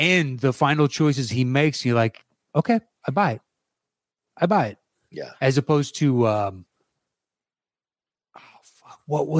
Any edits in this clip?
no; 0 cuts

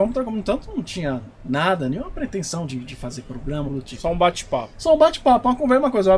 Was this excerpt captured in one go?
no; 2 cuts; at 1.3 s, 3.7 s

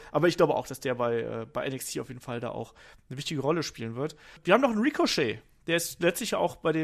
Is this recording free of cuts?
yes; 0 cuts

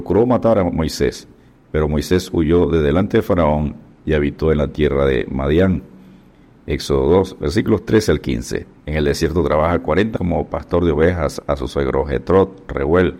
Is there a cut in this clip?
yes; 2 cuts; at 8.8 s, 10.2 s

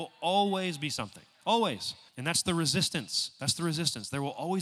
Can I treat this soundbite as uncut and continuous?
no; 1 cut; at 2.1 s

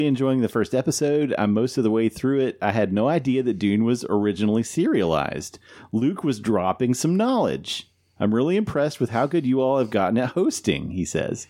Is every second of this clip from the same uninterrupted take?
yes; 0 cuts

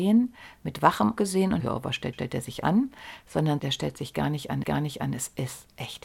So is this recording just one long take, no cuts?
no; 5 cuts; at 1.2 s, 1.6 s, 2.1 s, 3.6 s, 4.6 s

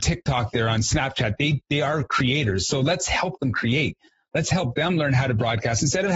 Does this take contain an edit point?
no; 0 cuts

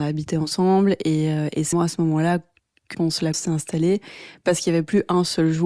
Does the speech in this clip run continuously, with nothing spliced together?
no; 3 cuts; at 1.7 s, 2.9 s, 3.3 s

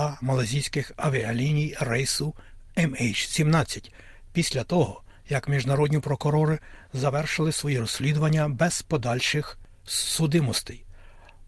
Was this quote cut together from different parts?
no; 0 cuts

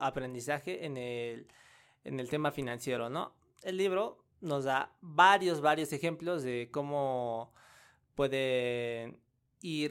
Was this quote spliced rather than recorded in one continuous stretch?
no; 0 cuts

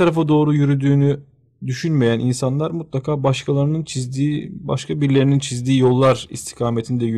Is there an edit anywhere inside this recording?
no; 0 cuts

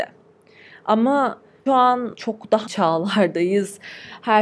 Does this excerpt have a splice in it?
yes; 3 cuts; at 1.7 s, 2.1 s, 2.7 s

